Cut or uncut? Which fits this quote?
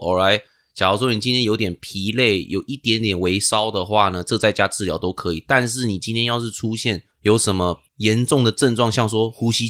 cut